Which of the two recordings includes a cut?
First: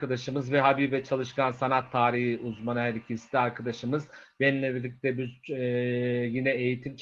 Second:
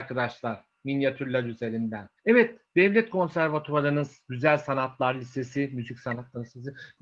second; 1 cut; at 2.2 s

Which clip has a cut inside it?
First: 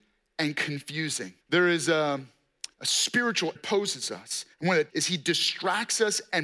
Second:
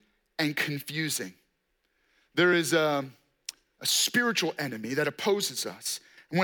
first; 5 cuts; at 1.4 s, 2.7 s, 3.5 s, 4.5 s, 4.9 s

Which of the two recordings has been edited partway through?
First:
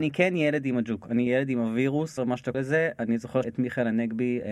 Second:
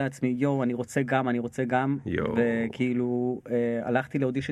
first; 4 cuts; at 1.3 s, 2.2 s, 2.5 s, 3.4 s

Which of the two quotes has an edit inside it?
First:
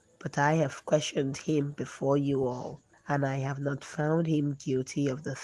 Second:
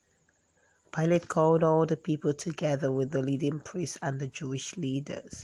first; 1 cut; at 2.9 s

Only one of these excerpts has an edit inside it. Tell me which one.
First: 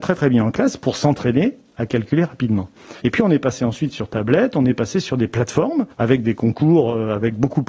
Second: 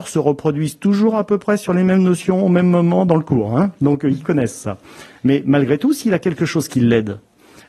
first; 2 cuts; at 3.0 s, 5.9 s

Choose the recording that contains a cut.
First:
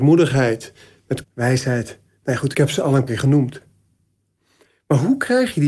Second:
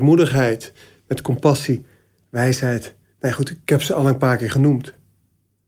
first; 3 cuts; at 1.2 s, 2.5 s, 3.1 s

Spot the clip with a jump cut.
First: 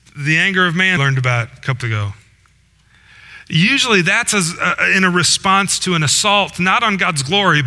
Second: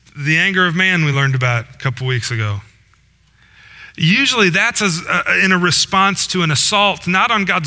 first; 2 cuts; at 1.0 s, 1.8 s

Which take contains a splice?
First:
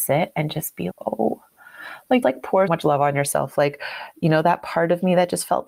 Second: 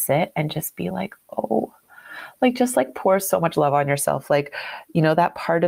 first; 3 cuts; at 0.9 s, 2.2 s, 2.7 s

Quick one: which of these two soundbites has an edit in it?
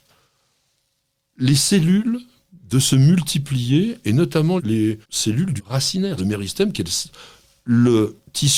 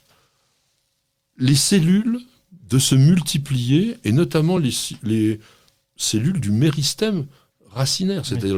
first; 4 cuts; at 4.6 s, 5.0 s, 5.6 s, 6.2 s

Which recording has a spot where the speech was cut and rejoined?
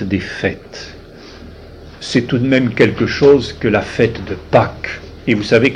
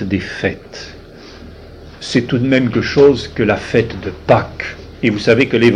second; 1 cut; at 2.7 s

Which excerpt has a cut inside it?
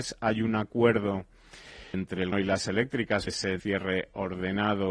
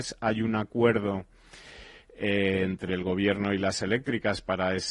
first; 4 cuts; at 1.9 s, 2.3 s, 3.3 s, 3.6 s

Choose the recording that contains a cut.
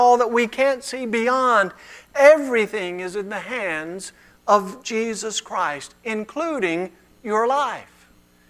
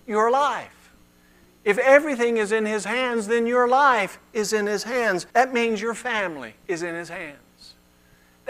second; 1 cut; at 5.3 s

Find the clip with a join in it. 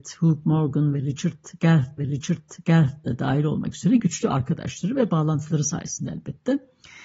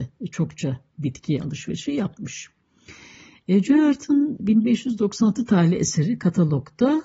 first; 1 cut; at 2.0 s

